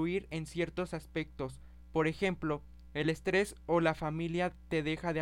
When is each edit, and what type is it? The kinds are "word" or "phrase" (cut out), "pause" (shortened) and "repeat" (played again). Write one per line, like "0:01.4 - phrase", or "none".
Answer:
none